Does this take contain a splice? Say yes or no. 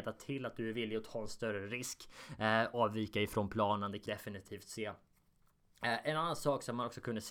yes